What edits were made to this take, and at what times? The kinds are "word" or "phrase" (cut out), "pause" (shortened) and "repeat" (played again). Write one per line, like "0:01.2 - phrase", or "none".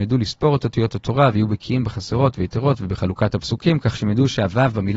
none

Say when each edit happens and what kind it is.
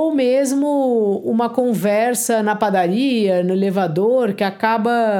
none

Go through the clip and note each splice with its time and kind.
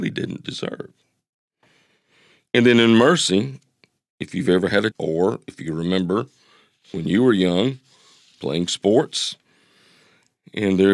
0:04.9 - word

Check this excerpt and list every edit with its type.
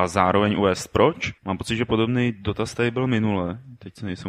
0:01.4 - pause

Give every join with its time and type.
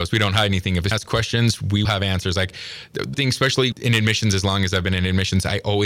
0:00.9 - word
0:01.8 - word
0:03.1 - word
0:03.7 - word

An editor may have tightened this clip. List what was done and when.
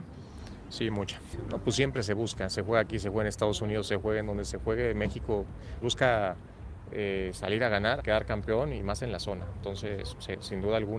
0:05.8 - word
0:08.0 - word

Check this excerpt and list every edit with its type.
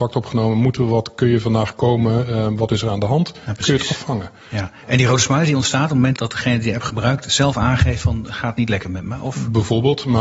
0:06.2 - word

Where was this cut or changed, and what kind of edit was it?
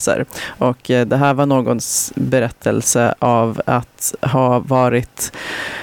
none

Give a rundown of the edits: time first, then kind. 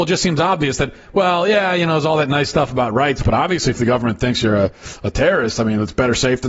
none

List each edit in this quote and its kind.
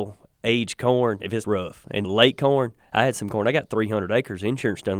0:01.4 - phrase
0:02.0 - word

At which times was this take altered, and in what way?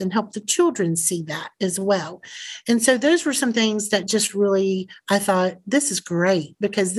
none

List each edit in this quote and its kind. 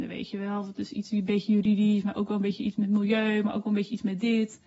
none

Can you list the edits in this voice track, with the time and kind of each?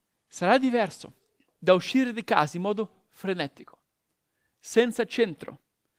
none

